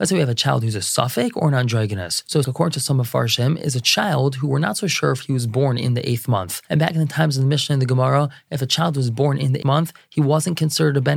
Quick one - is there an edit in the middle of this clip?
yes; 2 cuts; at 2.4 s, 9.6 s

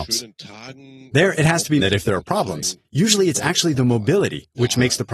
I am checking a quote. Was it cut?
yes; 2 cuts; at 1.8 s, 2.8 s

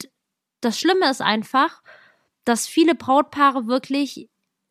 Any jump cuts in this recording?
no; 0 cuts

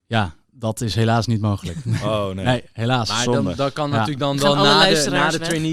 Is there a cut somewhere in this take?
no; 0 cuts

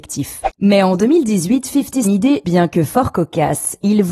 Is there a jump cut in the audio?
yes; 2 cuts; at 2.0 s, 2.4 s

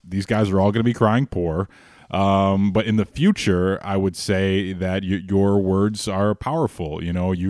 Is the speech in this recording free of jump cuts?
yes; 0 cuts

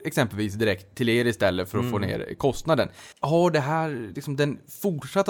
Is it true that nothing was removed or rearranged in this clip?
no; 1 cut; at 3.1 s

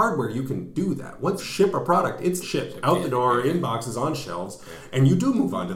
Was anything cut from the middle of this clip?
yes; 2 cuts; at 1.4 s, 2.4 s

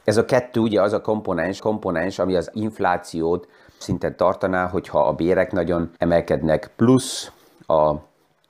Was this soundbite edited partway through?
yes; 4 cuts; at 1.6 s, 2.5 s, 3.8 s, 6.0 s

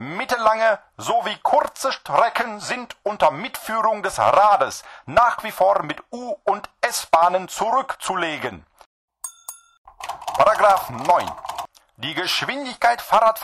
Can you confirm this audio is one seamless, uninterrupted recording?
yes; 0 cuts

